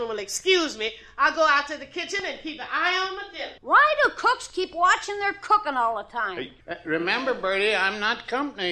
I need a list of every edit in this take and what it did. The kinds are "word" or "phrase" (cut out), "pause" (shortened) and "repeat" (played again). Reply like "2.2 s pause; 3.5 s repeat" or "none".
3.6 s pause; 6.6 s pause